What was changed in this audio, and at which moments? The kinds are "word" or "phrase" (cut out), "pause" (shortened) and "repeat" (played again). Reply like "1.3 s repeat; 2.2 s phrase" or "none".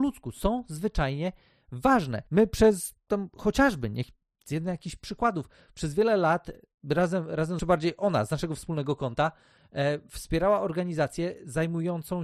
2.3 s pause; 7.6 s phrase